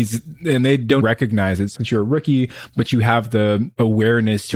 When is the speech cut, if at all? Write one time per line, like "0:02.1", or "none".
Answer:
0:01.0
0:01.8